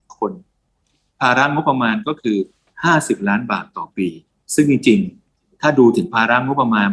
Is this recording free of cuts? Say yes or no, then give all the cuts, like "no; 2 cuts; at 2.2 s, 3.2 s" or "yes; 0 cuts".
no; 1 cut; at 4.4 s